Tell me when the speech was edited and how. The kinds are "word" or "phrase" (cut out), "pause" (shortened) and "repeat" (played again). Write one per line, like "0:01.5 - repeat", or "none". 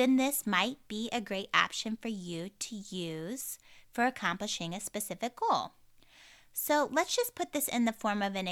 none